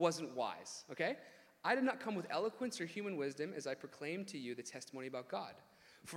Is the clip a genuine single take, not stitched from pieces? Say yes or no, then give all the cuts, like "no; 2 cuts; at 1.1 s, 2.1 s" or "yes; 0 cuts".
yes; 0 cuts